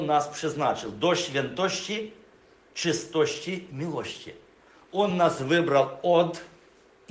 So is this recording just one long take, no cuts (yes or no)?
yes